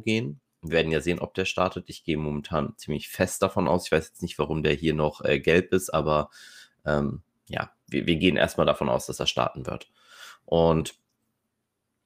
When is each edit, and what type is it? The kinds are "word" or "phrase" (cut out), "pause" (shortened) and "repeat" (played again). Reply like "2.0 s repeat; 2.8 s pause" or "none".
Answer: none